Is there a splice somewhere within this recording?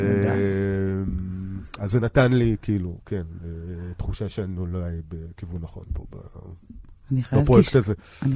no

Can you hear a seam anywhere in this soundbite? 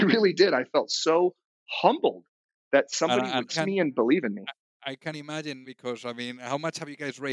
yes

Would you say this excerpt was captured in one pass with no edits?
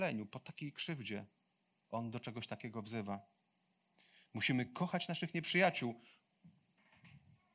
yes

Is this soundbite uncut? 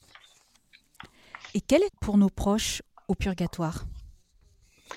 no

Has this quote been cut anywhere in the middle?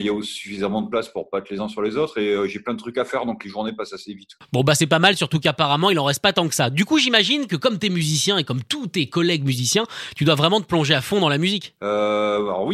no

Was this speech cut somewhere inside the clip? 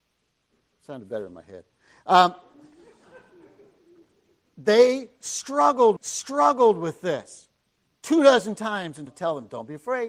yes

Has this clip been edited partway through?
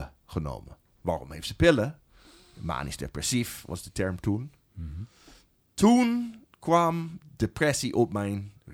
no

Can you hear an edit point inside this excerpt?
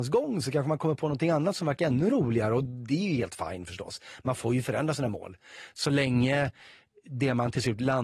no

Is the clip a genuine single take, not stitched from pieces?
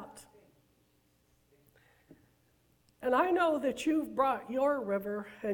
yes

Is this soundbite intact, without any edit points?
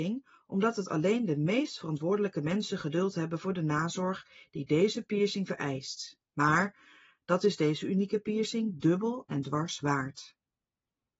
yes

